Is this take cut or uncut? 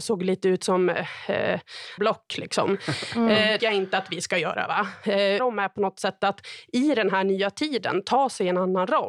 cut